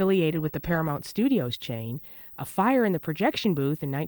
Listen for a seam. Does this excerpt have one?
no; 0 cuts

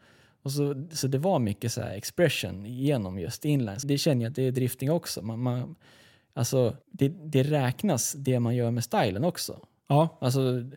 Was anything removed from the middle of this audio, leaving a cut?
yes; 2 cuts; at 3.8 s, 6.8 s

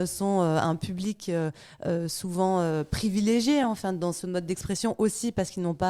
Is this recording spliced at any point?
no; 0 cuts

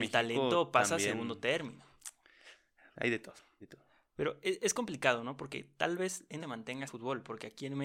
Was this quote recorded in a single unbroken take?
no; 4 cuts; at 2.9 s, 3.6 s, 6.4 s, 6.9 s

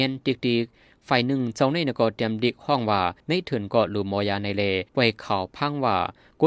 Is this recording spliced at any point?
yes; 2 cuts; at 3.2 s, 4.9 s

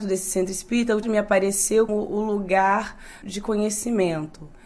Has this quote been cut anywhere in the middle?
yes; 3 cuts; at 1.0 s, 1.9 s, 3.2 s

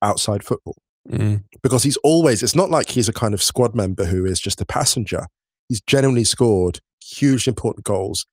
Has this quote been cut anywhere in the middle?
no; 0 cuts

